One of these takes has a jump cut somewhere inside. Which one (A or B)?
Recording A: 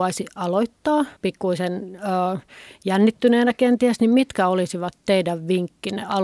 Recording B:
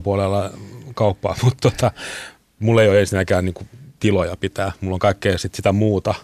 A